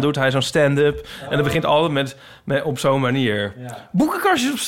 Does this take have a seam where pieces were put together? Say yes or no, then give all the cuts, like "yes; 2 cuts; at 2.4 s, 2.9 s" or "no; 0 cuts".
no; 0 cuts